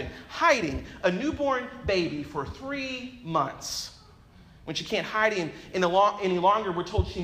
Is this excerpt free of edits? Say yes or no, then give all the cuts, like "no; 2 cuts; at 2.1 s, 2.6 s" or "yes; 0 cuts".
yes; 0 cuts